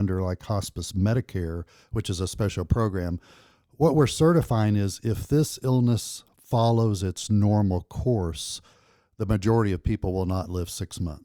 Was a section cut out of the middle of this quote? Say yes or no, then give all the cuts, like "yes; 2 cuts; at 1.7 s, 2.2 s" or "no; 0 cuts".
no; 0 cuts